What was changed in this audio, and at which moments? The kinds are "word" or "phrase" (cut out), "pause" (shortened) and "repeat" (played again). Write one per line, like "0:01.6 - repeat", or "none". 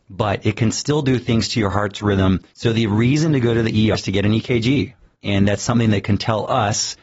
0:02.5 - pause
0:03.9 - word
0:05.0 - pause

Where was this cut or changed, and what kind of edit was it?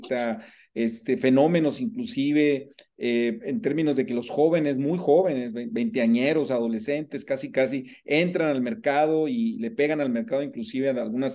none

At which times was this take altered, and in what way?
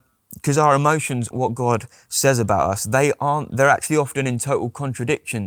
0:01.3 - word
0:03.5 - phrase

